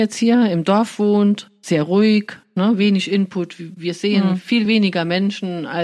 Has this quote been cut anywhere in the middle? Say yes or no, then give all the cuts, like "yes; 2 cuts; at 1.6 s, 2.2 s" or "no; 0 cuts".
no; 0 cuts